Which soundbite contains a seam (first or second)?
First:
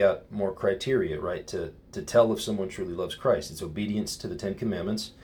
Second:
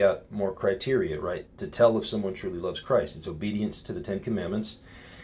second